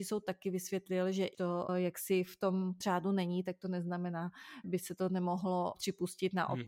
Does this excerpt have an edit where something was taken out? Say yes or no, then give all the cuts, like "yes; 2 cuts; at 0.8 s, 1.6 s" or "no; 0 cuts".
yes; 5 cuts; at 1.3 s, 1.7 s, 2.8 s, 4.6 s, 5.7 s